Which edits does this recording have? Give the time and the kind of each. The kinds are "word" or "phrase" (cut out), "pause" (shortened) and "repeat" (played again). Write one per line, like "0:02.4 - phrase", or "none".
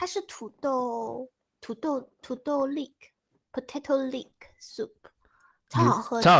none